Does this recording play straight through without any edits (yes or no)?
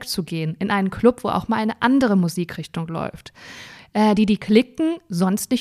yes